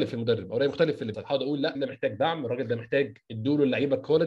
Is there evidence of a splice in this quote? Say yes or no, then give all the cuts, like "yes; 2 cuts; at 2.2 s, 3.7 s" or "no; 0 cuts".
yes; 2 cuts; at 1.1 s, 1.7 s